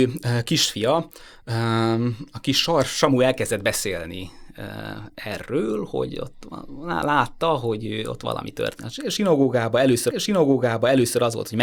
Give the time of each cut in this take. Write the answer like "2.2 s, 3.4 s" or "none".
10.1 s